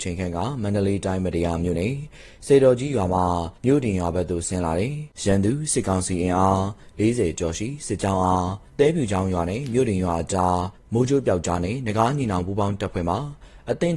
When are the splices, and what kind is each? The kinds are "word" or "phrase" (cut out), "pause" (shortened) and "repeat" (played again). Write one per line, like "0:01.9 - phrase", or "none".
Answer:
0:03.5 - pause
0:05.1 - pause
0:08.7 - pause
0:10.7 - pause